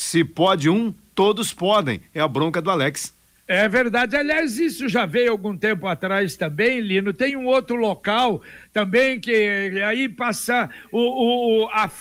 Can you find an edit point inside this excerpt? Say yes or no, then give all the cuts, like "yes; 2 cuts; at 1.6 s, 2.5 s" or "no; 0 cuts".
no; 0 cuts